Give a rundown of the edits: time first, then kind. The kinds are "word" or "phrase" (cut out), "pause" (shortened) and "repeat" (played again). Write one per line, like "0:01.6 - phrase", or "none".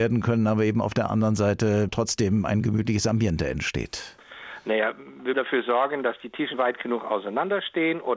0:01.9 - word
0:05.3 - word

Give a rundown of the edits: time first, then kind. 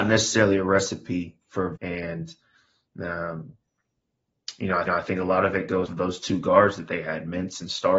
0:01.4 - pause
0:01.8 - word
0:04.9 - repeat
0:05.9 - word

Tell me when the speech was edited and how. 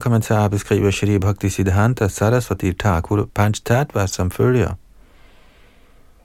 none

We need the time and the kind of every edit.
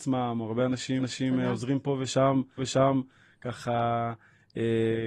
0:01.0 - repeat
0:02.6 - repeat

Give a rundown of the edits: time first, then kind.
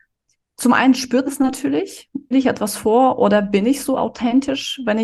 0:01.3 - word
0:02.3 - word

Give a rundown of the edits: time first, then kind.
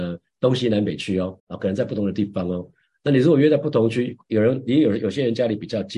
0:01.4 - pause

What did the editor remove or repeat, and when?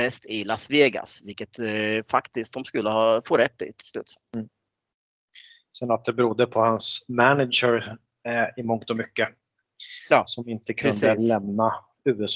0:02.5 - word

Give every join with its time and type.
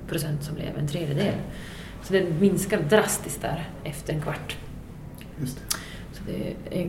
none

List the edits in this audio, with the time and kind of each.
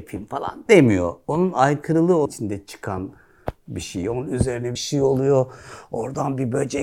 0:02.3 - phrase
0:04.8 - phrase

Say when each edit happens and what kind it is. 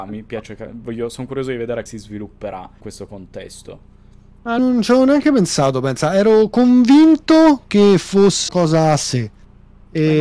0:01.9 - word
0:02.8 - word
0:04.6 - word
0:08.5 - word

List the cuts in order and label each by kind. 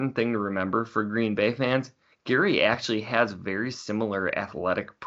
none

